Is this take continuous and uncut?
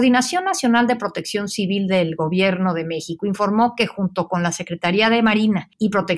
yes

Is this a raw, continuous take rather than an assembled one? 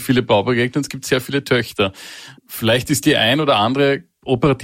no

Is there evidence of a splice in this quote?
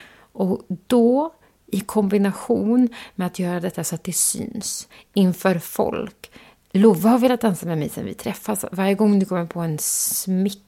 no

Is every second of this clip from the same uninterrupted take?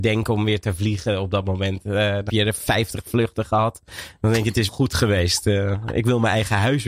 no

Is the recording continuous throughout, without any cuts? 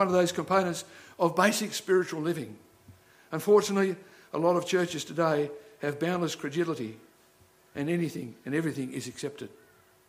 yes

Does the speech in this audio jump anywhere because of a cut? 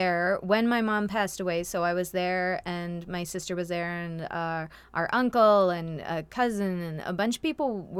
no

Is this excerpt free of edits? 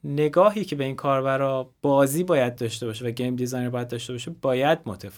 yes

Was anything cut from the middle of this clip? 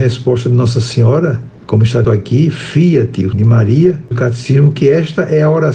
yes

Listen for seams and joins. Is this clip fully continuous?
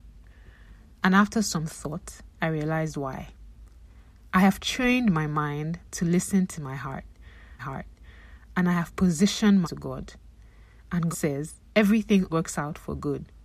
no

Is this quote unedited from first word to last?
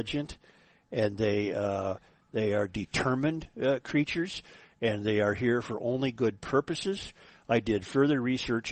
yes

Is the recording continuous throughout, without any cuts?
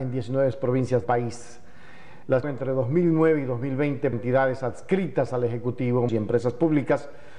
no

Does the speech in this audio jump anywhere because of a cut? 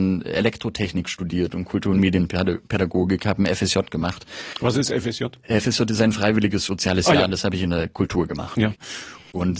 no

